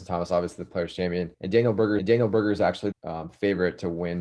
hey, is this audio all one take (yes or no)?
no